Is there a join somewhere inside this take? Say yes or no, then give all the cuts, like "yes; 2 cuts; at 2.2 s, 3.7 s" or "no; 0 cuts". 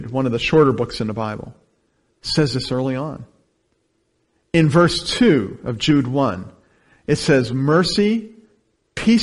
no; 0 cuts